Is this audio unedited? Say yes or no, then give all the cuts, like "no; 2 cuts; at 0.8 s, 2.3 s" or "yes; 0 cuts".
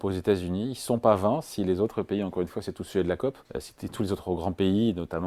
no; 1 cut; at 3.5 s